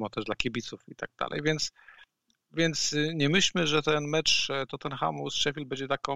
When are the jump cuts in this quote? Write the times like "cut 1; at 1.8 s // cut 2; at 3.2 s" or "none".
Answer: none